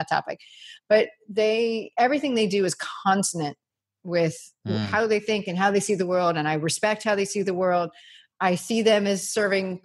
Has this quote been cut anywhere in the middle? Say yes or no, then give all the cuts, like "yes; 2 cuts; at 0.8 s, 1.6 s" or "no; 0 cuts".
no; 0 cuts